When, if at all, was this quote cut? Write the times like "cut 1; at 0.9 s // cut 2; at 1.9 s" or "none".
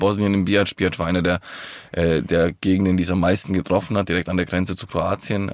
none

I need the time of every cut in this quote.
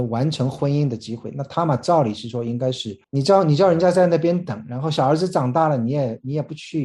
cut 1; at 3.0 s

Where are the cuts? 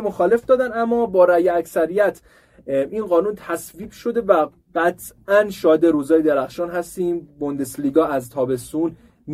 none

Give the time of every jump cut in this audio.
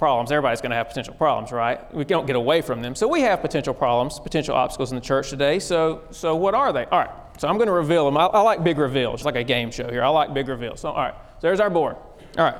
cut 1; at 9.2 s

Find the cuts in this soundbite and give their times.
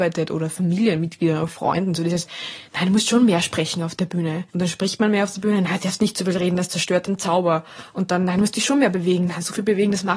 cut 1; at 4.5 s

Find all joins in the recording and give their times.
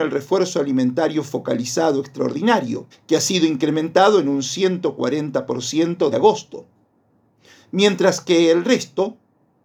cut 1; at 2.9 s // cut 2; at 6.1 s

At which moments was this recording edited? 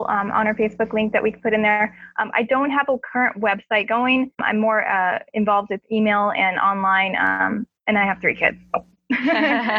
cut 1; at 4.3 s

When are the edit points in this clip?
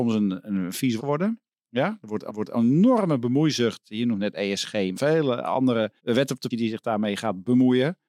cut 1; at 1.0 s // cut 2; at 2.3 s // cut 3; at 4.9 s // cut 4; at 6.0 s // cut 5; at 6.5 s

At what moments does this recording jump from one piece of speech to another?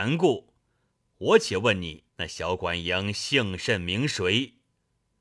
cut 1; at 2.1 s

